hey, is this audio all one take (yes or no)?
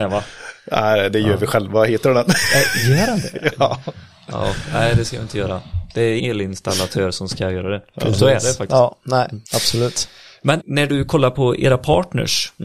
no